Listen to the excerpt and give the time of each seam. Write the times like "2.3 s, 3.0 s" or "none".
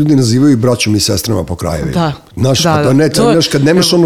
3.1 s